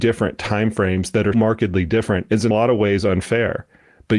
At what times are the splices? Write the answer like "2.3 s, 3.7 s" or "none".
1.3 s, 2.5 s